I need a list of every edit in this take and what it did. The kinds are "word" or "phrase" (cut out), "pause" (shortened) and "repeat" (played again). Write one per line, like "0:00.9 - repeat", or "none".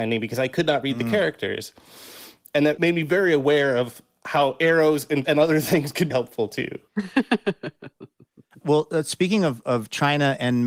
0:02.8 - word
0:05.2 - word
0:06.1 - word
0:08.6 - word
0:09.6 - word

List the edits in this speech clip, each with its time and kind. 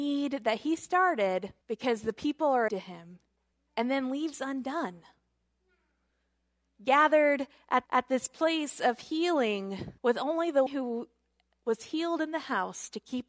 0:01.6 - pause
0:02.7 - word
0:03.5 - pause
0:07.9 - repeat
0:10.0 - pause
0:10.7 - word

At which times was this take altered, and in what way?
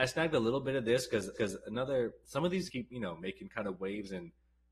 0:01.3 - repeat
0:02.7 - word

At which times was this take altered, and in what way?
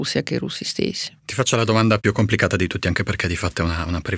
0:01.2 - pause

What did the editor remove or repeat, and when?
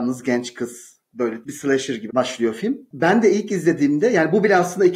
0:01.4 - word
0:02.1 - word

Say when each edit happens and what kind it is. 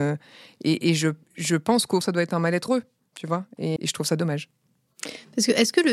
0:01.2 - pause
0:02.0 - word
0:02.7 - word
0:03.8 - word

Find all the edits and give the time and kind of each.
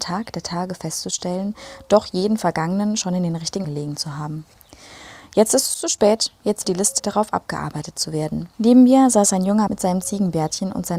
0:03.6 - word
0:06.6 - word
0:07.0 - phrase
0:08.5 - pause
0:09.7 - word

